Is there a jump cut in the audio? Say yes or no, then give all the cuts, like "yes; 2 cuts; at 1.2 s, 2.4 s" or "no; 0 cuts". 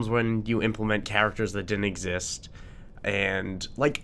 no; 0 cuts